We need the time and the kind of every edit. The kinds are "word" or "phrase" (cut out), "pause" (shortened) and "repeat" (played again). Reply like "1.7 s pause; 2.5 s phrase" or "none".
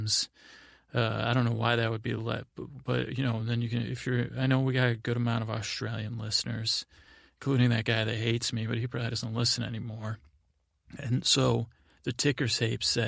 none